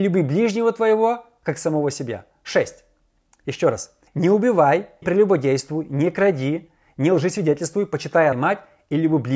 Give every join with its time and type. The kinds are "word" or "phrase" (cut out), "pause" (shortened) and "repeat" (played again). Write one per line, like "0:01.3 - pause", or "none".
0:04.1 - pause
0:05.0 - word
0:08.3 - word